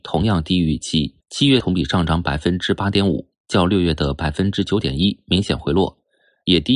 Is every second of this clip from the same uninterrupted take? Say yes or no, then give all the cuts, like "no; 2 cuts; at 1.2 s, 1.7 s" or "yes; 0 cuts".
no; 2 cuts; at 1.2 s, 1.6 s